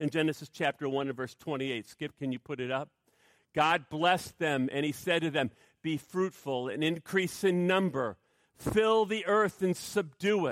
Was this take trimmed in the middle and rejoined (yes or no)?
no